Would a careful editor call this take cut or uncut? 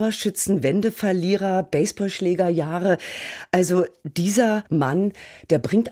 cut